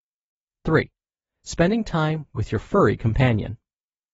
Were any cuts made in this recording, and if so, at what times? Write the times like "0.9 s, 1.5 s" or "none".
none